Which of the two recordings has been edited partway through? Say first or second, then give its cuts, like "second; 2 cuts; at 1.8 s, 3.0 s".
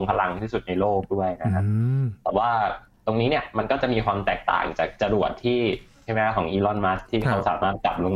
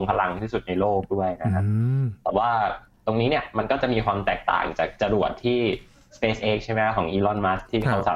first; 1 cut; at 6.1 s